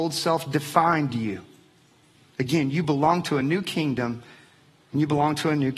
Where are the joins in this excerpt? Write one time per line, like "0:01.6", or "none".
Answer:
none